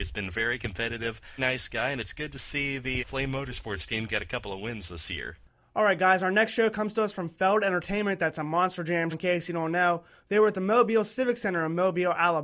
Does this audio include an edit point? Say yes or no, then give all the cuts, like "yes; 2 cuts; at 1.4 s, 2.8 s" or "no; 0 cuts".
yes; 3 cuts; at 1.4 s, 3.0 s, 9.1 s